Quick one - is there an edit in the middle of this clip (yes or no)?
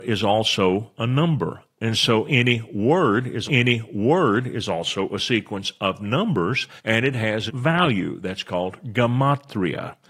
yes